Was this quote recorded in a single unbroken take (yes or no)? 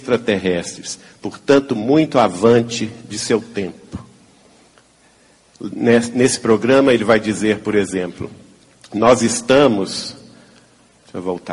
yes